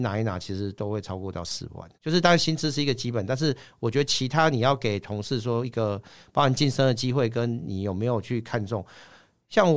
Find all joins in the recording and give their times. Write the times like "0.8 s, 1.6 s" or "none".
1.9 s